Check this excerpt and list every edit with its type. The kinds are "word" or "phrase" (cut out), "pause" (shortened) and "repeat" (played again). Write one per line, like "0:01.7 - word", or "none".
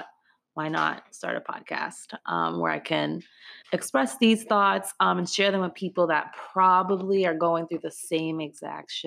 0:03.6 - pause